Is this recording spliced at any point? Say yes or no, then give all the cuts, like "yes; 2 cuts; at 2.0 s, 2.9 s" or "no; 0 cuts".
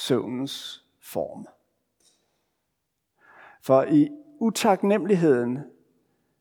no; 0 cuts